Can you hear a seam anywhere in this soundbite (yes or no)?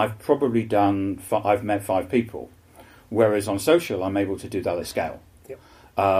no